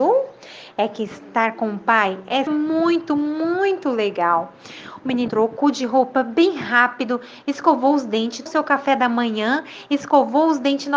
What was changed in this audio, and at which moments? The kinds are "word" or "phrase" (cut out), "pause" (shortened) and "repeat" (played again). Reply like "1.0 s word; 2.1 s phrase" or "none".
2.5 s phrase; 5.3 s word; 8.5 s word